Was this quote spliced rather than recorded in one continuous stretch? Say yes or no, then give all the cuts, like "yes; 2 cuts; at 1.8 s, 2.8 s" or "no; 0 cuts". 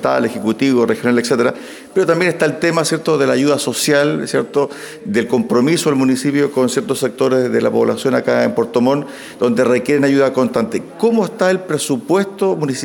no; 0 cuts